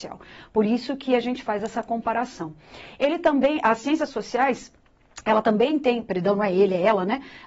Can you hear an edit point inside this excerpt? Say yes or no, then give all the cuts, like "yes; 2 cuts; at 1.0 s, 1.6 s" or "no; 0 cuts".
no; 0 cuts